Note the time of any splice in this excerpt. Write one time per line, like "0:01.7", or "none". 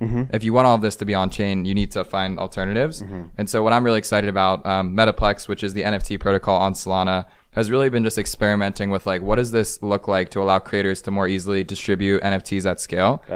none